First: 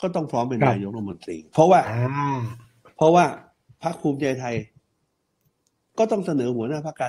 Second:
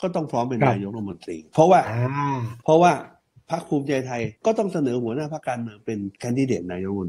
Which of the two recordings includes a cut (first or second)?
second